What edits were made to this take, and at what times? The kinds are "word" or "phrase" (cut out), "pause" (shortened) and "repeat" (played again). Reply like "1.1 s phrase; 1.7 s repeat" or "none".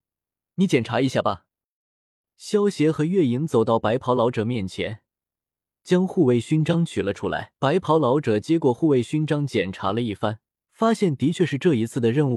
7.6 s pause; 10.6 s pause